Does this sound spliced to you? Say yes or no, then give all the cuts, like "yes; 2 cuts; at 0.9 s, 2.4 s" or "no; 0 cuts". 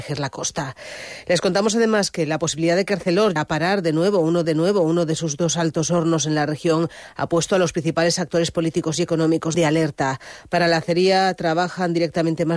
yes; 3 cuts; at 3.4 s, 4.4 s, 9.5 s